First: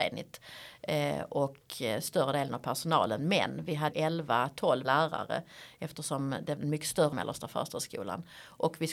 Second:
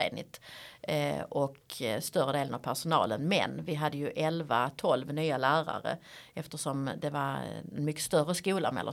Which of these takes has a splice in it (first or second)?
first